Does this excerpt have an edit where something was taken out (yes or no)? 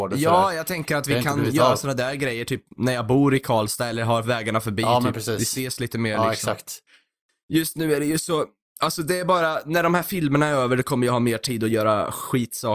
no